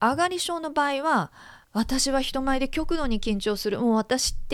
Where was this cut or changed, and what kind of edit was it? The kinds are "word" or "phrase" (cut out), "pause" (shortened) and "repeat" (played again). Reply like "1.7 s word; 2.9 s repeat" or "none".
1.6 s pause